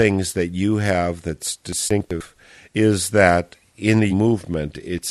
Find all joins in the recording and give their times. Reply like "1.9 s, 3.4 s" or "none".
4.1 s